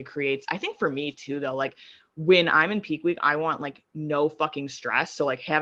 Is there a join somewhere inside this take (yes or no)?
no